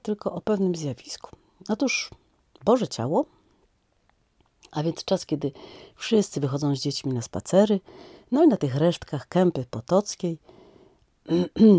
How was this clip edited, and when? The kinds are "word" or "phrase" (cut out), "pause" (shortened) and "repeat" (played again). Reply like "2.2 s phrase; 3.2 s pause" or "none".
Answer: none